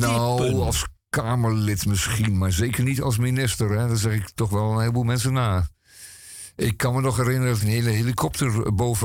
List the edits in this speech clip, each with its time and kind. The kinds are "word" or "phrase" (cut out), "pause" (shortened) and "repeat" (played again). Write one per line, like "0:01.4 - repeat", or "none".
0:07.6 - phrase